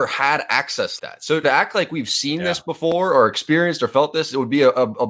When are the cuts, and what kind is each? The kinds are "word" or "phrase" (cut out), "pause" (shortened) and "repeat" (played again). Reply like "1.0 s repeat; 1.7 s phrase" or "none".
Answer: 1.0 s word; 1.4 s word